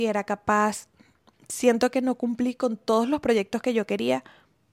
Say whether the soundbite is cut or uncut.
uncut